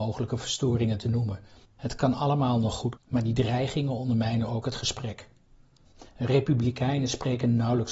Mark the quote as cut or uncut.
cut